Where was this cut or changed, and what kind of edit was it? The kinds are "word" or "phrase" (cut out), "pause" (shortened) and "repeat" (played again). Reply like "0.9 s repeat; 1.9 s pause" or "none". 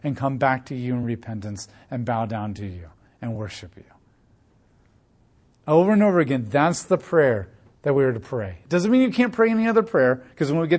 none